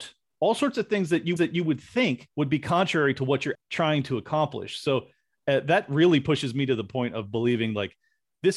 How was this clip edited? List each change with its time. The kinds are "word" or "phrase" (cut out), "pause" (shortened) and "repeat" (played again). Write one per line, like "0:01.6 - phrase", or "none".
0:01.4 - repeat
0:02.3 - pause
0:03.5 - word